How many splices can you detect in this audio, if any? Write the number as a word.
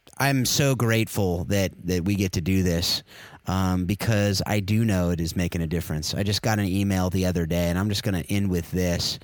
zero